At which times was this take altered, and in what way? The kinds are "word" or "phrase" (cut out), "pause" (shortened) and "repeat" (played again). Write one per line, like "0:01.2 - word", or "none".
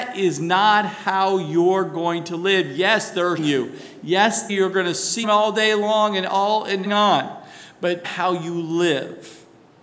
0:03.4 - word
0:04.5 - word
0:05.2 - word
0:06.9 - phrase
0:08.0 - phrase